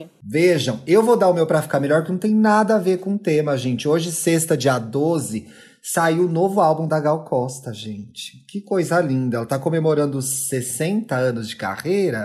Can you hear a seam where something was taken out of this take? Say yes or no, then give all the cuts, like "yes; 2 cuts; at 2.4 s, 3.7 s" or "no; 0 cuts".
no; 0 cuts